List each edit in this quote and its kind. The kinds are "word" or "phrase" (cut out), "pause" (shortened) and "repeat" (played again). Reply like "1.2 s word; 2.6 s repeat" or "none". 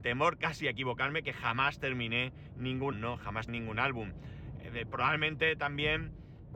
2.9 s word; 3.5 s word